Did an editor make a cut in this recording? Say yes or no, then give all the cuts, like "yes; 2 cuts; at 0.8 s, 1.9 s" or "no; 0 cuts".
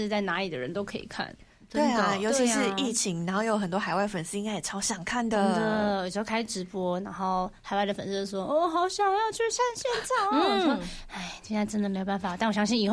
no; 0 cuts